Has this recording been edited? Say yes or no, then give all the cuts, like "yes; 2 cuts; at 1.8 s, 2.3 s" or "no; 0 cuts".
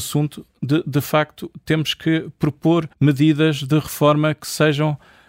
yes; 1 cut; at 2.9 s